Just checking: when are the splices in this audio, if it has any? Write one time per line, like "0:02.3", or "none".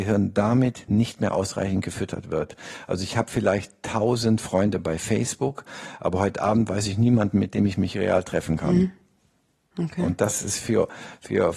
none